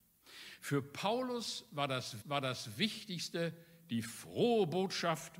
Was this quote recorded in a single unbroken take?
no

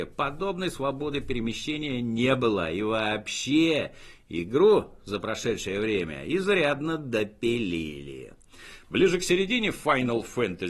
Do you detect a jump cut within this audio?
no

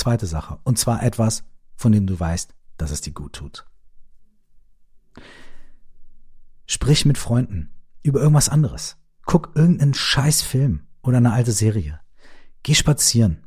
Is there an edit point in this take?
no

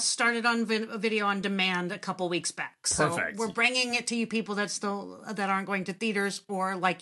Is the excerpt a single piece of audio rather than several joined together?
yes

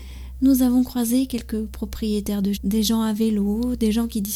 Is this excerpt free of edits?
no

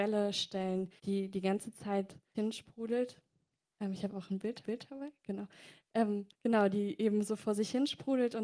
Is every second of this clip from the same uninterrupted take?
no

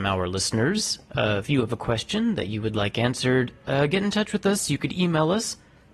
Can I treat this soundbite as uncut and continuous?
yes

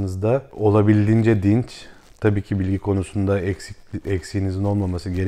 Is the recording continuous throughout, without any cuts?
yes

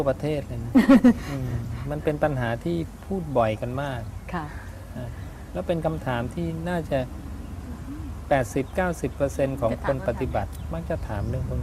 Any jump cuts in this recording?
no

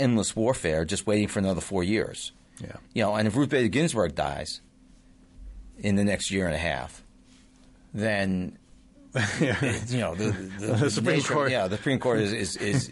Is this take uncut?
yes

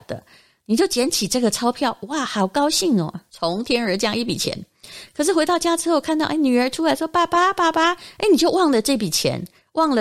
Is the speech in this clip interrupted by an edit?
no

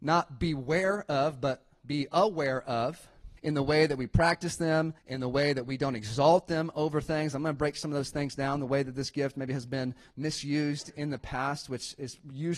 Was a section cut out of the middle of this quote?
yes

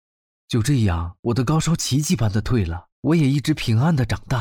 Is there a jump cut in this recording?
yes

